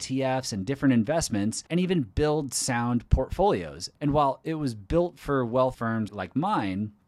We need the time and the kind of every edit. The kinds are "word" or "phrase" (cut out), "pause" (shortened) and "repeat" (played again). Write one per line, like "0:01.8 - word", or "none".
0:01.7 - pause
0:04.0 - pause
0:05.7 - word
0:06.1 - word